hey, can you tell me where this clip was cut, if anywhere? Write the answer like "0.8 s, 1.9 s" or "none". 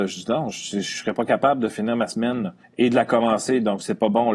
2.6 s